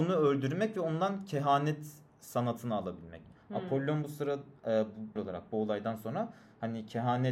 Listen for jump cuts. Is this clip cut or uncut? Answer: cut